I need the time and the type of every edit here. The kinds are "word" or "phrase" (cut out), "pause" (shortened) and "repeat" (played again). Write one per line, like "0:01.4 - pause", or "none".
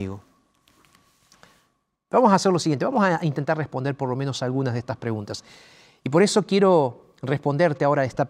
none